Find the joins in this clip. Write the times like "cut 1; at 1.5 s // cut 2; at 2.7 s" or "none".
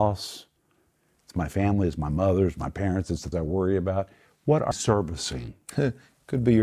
cut 1; at 3.3 s // cut 2; at 4.7 s